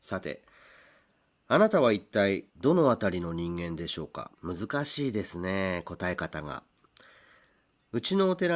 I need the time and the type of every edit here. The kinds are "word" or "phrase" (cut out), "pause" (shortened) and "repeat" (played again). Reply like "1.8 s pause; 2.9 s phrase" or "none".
2.5 s pause; 4.4 s pause